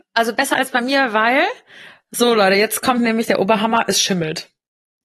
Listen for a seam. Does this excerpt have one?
no; 0 cuts

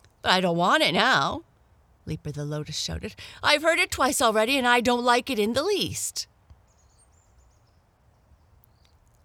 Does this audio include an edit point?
no; 0 cuts

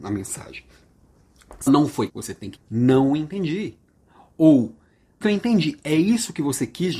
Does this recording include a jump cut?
yes; 4 cuts; at 1.7 s, 2.1 s, 2.6 s, 5.2 s

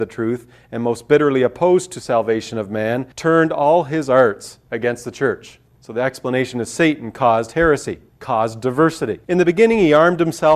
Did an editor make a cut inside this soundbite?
yes; 3 cuts; at 3.1 s, 5.7 s, 9.2 s

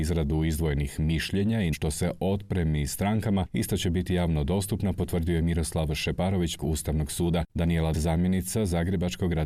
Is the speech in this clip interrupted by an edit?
yes; 3 cuts; at 1.7 s, 6.6 s, 7.9 s

